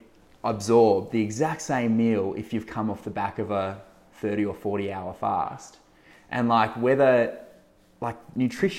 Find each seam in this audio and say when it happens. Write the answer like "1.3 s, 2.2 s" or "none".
none